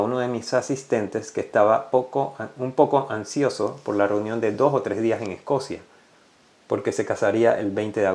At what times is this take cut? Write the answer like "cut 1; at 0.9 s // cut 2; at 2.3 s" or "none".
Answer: none